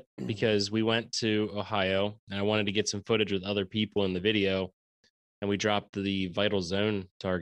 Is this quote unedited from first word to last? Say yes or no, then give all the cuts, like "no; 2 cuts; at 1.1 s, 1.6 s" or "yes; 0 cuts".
yes; 0 cuts